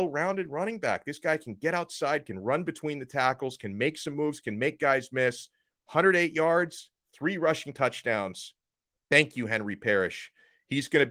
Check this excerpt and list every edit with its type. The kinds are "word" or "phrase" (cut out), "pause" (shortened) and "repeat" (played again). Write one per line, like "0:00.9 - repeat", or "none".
none